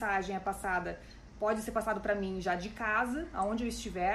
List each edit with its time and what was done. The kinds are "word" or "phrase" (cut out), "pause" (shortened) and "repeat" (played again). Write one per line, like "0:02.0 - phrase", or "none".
none